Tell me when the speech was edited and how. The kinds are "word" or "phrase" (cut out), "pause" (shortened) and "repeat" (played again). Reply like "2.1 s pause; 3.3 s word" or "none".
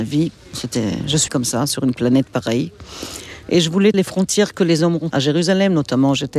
1.3 s word; 3.9 s word; 5.1 s word